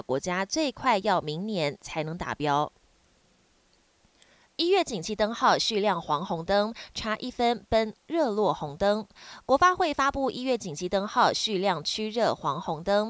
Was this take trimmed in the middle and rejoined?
no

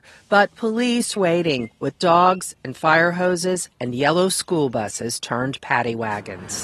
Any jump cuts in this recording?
yes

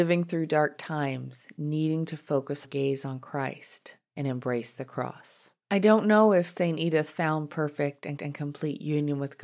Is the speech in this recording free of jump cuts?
no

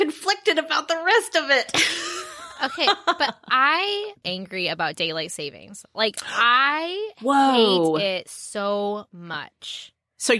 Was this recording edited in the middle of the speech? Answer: yes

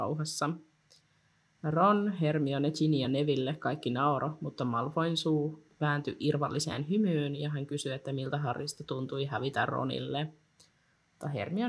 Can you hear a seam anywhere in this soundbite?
no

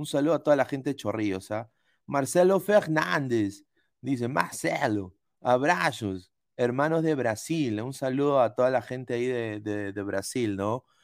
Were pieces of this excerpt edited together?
no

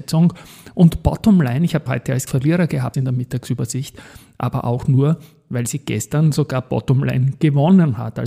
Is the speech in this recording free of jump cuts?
no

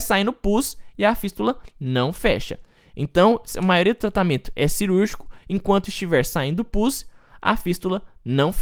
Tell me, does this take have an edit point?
no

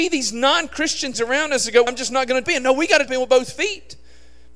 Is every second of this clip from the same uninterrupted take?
no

